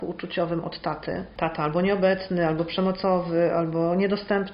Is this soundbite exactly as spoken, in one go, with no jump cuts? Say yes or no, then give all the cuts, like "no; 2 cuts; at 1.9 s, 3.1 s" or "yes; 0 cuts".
yes; 0 cuts